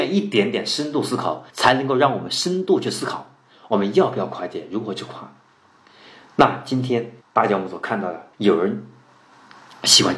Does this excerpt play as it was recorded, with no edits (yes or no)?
no